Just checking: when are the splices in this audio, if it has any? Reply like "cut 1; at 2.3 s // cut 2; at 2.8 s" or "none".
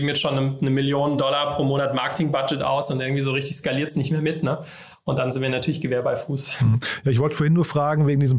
none

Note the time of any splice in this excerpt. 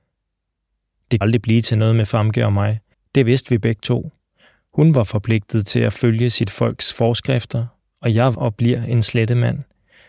cut 1; at 1.2 s // cut 2; at 2.9 s // cut 3; at 8.3 s

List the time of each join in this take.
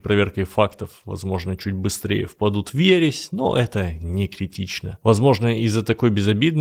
none

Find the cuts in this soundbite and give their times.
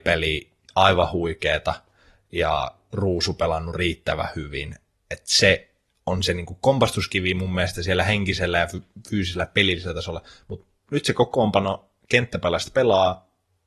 none

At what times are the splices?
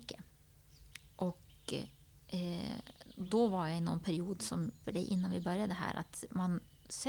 cut 1; at 4.8 s

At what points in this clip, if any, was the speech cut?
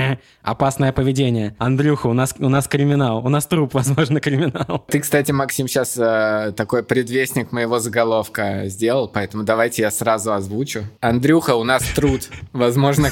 none

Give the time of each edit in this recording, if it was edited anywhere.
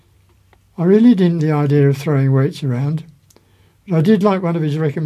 cut 1; at 1.4 s

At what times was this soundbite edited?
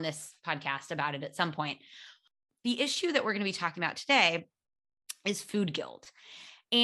none

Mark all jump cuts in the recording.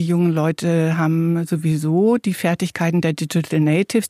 none

